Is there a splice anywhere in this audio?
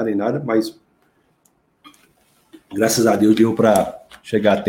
no; 0 cuts

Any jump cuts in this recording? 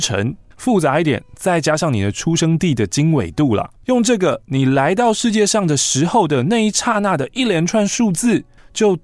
no; 0 cuts

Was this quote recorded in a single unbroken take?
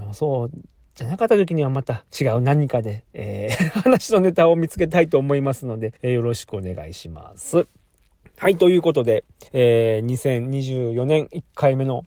no; 3 cuts; at 2.1 s, 6.0 s, 9.5 s

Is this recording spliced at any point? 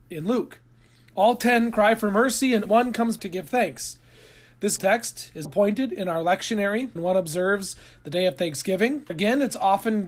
yes; 6 cuts; at 2.6 s, 3.2 s, 4.8 s, 5.4 s, 7.0 s, 9.1 s

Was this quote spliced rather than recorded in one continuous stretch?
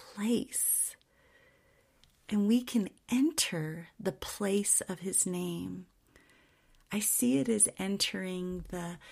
no; 0 cuts

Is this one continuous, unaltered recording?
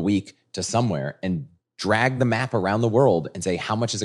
yes; 0 cuts

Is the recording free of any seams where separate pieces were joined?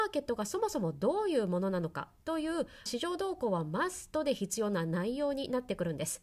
no; 1 cut; at 2.9 s

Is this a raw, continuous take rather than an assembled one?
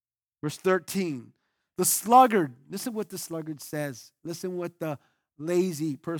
yes; 0 cuts

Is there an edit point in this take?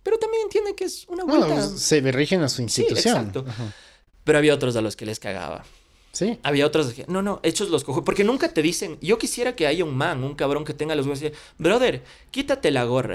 no; 0 cuts

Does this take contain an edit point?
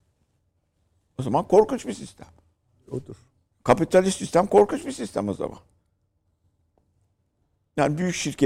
no; 0 cuts

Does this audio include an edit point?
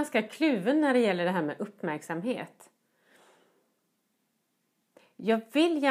no; 0 cuts

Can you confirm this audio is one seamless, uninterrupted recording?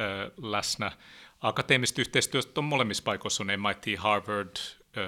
yes; 0 cuts

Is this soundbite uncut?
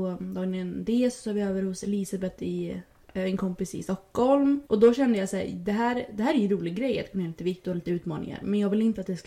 no; 1 cut; at 4.7 s

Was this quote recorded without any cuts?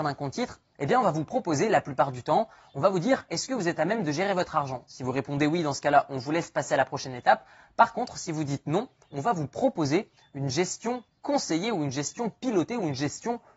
yes; 0 cuts

